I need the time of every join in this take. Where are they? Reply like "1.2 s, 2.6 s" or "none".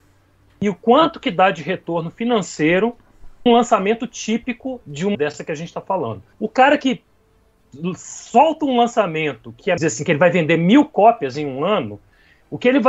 3.5 s, 5.1 s, 6.3 s, 9.8 s